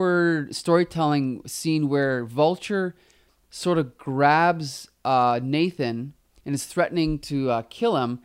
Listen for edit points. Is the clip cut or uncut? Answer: uncut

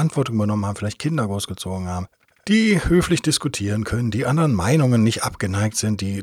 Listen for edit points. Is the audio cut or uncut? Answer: cut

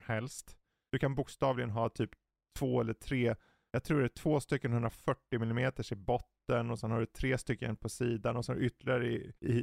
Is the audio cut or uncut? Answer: uncut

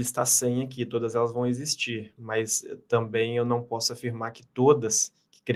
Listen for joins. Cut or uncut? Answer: uncut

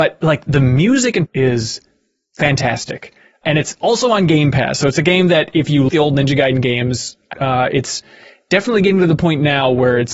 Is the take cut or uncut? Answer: cut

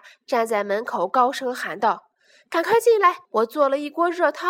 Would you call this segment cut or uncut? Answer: cut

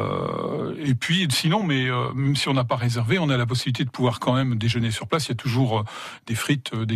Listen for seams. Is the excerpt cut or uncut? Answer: uncut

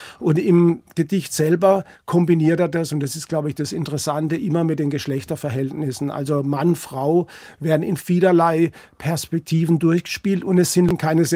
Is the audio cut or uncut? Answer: uncut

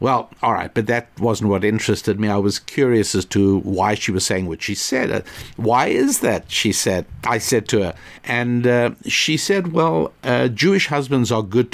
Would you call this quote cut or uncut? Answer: cut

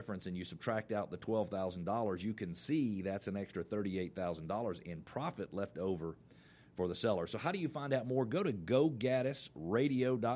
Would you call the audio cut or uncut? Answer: uncut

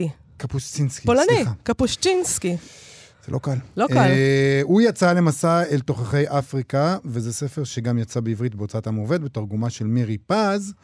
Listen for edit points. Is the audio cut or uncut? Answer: uncut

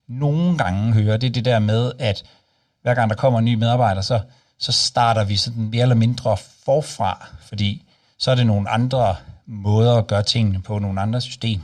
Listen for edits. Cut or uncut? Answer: uncut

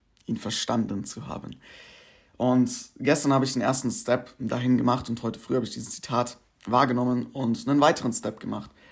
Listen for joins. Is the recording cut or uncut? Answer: uncut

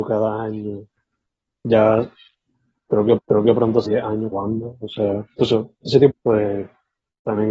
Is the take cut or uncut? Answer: cut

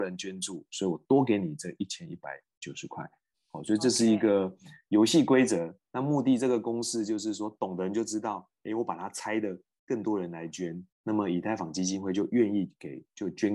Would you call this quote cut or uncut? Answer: cut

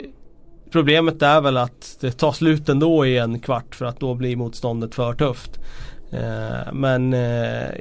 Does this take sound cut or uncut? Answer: uncut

